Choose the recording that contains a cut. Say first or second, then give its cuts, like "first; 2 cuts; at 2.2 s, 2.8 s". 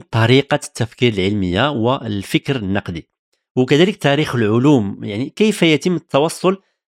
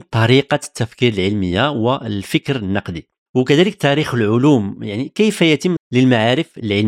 second; 2 cuts; at 3.3 s, 5.8 s